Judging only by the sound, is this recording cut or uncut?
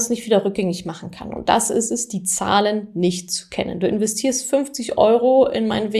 uncut